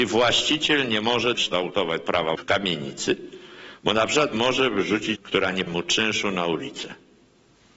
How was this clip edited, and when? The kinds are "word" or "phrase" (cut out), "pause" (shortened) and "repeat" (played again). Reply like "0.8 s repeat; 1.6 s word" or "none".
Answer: 1.3 s word; 2.0 s word; 2.3 s word; 4.3 s word; 5.1 s word; 5.7 s word

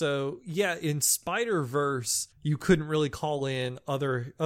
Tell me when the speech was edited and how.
2.3 s pause

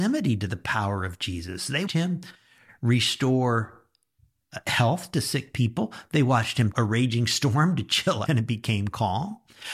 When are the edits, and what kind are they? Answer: 1.9 s word; 6.7 s word; 8.3 s word

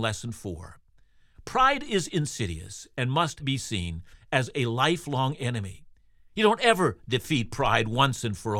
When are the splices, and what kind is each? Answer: none

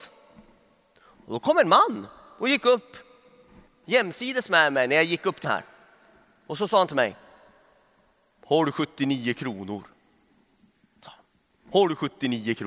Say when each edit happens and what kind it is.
5.4 s word

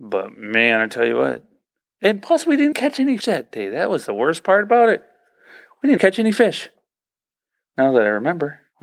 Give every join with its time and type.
2.7 s word; 3.2 s word; 6.0 s word

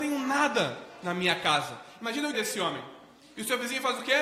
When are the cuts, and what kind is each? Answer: 2.3 s word

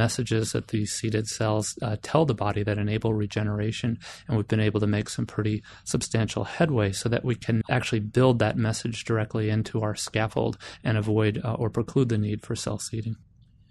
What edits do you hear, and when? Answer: 7.6 s word

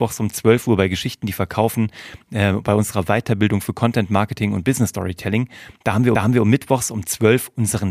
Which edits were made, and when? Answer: 6.1 s repeat

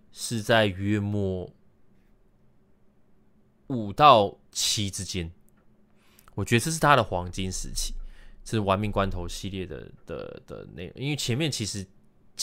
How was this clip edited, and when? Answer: 4.5 s pause

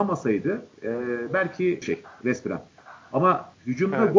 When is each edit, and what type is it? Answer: 1.8 s phrase

